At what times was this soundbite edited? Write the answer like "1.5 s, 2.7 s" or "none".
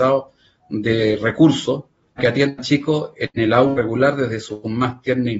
2.2 s